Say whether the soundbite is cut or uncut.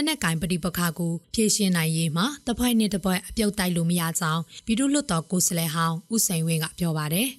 cut